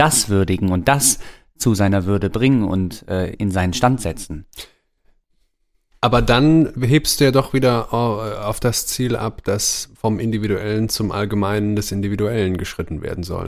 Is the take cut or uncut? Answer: cut